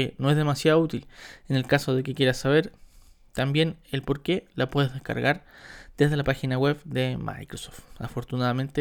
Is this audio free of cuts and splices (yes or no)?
yes